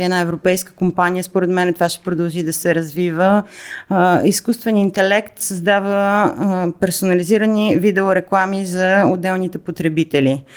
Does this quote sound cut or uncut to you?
uncut